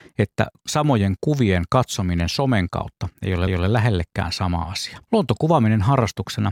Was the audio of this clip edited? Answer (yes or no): yes